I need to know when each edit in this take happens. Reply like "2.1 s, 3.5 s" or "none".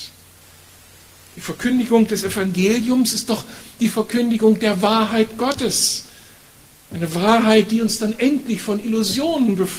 none

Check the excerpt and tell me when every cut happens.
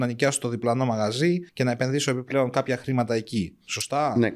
1.5 s

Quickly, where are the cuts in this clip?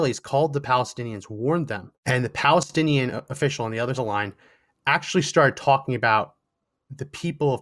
2.0 s, 3.9 s

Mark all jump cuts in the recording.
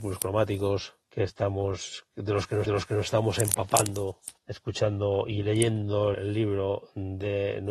1.0 s, 2.6 s, 4.4 s, 6.1 s

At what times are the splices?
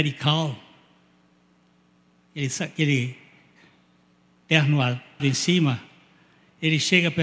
5.2 s

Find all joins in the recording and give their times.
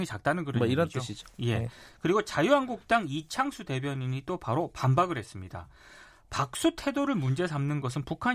none

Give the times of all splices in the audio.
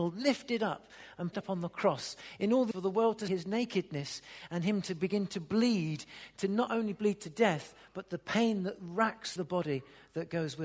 1.3 s, 2.7 s, 3.3 s, 9.4 s

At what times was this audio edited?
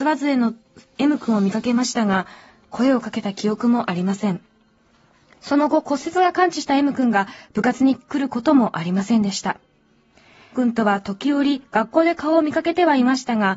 10.5 s

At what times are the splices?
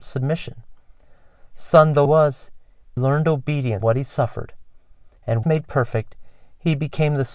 2.1 s, 3.0 s, 3.8 s, 5.4 s

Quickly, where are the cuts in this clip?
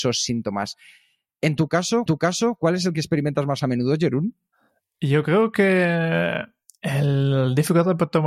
2.1 s

